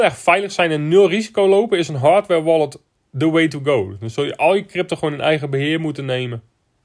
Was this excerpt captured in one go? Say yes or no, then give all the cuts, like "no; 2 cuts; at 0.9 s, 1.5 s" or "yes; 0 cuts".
yes; 0 cuts